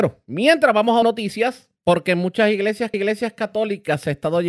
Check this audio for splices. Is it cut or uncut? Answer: cut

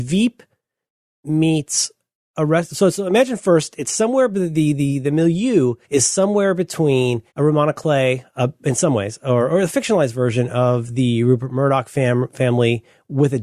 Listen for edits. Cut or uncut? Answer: cut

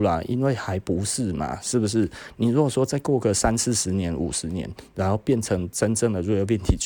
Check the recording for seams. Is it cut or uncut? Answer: uncut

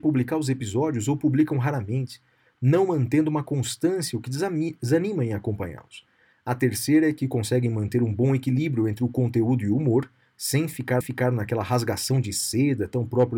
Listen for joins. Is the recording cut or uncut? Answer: cut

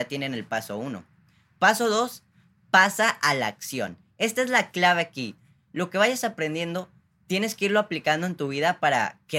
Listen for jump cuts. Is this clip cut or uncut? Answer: uncut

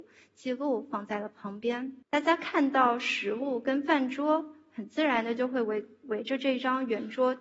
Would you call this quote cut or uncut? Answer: cut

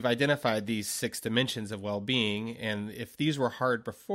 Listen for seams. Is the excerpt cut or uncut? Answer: uncut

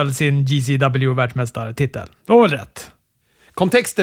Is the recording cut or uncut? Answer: uncut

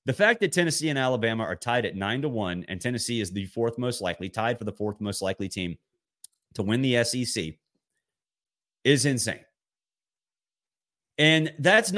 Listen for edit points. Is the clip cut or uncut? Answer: uncut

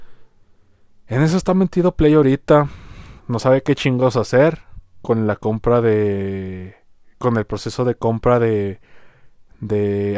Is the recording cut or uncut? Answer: cut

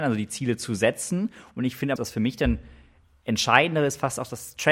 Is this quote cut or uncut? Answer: cut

